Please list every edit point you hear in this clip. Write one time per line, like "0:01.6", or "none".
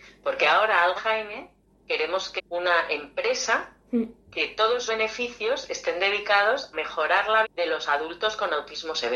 0:01.0
0:02.4
0:04.9
0:06.7
0:07.4